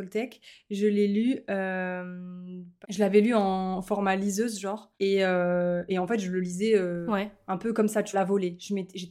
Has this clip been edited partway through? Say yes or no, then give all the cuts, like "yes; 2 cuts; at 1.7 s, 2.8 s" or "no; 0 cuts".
yes; 1 cut; at 8.1 s